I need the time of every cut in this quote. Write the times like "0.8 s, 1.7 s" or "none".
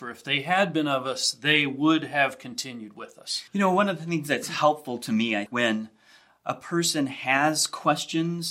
3.5 s, 5.5 s